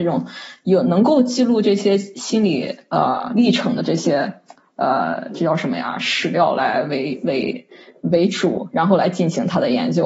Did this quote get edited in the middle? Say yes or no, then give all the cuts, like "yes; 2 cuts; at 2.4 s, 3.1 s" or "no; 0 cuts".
no; 0 cuts